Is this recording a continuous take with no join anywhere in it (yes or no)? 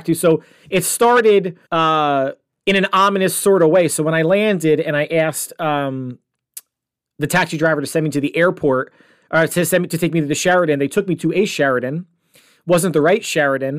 no